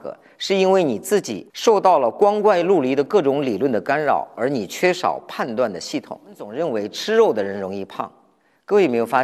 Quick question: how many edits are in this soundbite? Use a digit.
1